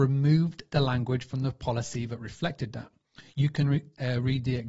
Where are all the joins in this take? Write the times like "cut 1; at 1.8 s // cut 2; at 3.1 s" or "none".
none